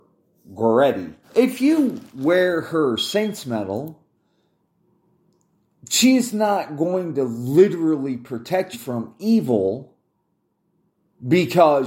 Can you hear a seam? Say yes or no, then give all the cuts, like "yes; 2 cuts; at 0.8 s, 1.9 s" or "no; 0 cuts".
yes; 2 cuts; at 1.2 s, 8.7 s